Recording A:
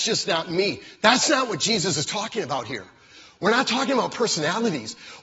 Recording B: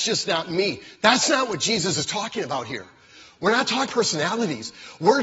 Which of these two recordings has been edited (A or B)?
B